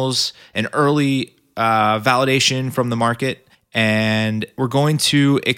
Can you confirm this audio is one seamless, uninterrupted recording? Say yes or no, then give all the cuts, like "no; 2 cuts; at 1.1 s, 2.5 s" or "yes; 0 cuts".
no; 1 cut; at 3.5 s